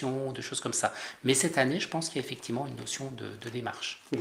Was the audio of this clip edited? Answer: no; 0 cuts

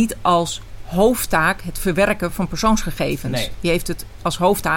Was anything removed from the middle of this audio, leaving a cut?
no; 0 cuts

